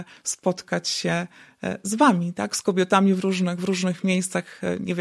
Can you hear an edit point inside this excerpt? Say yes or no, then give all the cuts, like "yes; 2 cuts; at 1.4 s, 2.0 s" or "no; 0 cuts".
no; 0 cuts